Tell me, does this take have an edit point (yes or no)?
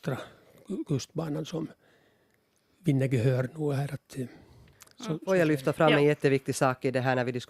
no